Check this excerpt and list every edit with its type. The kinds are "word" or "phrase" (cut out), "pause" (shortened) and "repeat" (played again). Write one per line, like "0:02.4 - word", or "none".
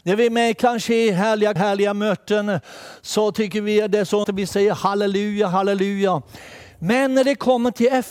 0:01.6 - word
0:04.2 - word

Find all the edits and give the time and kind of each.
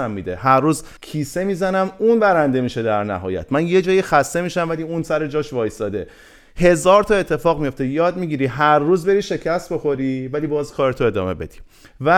0:01.0 - pause

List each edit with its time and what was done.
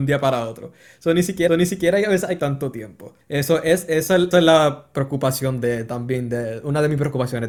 0:01.5 - repeat
0:02.4 - word
0:03.2 - pause
0:04.3 - word

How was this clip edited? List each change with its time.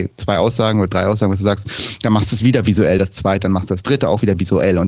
none

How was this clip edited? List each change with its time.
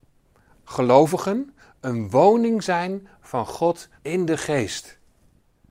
0:04.0 - pause

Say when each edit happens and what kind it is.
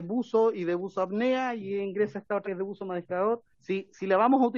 0:02.4 - word
0:03.5 - pause

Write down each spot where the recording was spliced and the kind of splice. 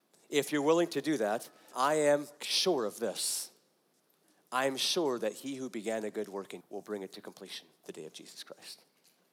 0:01.7 - word
0:02.4 - pause
0:06.6 - word
0:07.8 - word

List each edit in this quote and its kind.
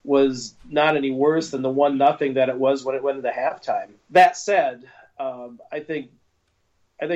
0:04.0 - pause

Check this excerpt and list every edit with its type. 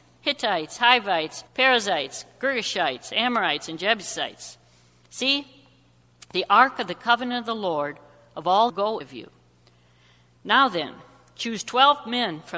0:01.5 - pause
0:08.7 - phrase
0:09.0 - phrase

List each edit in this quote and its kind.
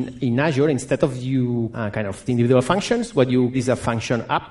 0:01.7 - word
0:02.3 - word
0:03.5 - word

